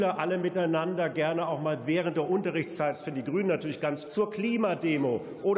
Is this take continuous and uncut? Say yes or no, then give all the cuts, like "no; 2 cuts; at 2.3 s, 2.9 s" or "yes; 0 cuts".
no; 1 cut; at 4.0 s